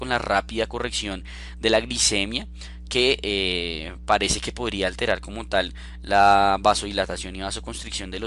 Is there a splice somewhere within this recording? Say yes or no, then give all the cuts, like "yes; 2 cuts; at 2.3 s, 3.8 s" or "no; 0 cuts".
no; 0 cuts